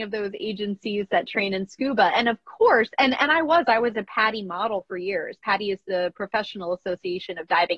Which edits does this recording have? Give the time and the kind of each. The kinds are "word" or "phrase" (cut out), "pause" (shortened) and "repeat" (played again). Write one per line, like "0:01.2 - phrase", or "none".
none